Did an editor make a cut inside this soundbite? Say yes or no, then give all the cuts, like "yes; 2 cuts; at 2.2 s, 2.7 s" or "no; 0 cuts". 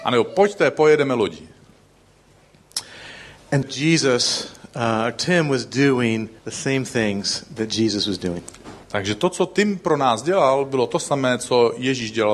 yes; 3 cuts; at 3.6 s, 6.4 s, 8.8 s